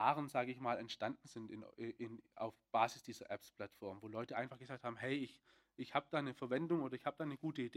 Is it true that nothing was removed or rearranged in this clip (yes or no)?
yes